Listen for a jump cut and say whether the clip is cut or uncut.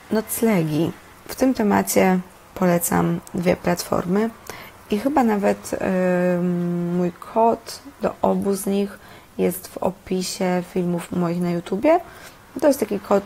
uncut